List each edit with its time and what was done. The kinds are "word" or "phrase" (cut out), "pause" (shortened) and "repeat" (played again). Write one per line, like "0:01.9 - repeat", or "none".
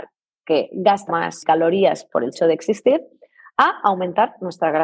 0:01.1 - word
0:02.3 - word